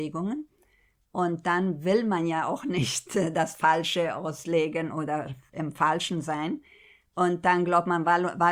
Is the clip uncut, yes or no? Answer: yes